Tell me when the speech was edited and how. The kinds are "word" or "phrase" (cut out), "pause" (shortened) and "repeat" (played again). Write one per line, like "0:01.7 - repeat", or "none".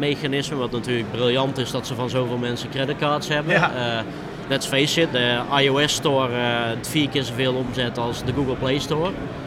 0:05.1 - word
0:06.8 - word
0:08.2 - word